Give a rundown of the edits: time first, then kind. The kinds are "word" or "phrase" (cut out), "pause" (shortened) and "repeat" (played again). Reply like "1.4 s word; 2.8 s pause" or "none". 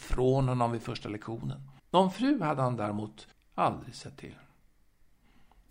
1.8 s pause; 3.3 s pause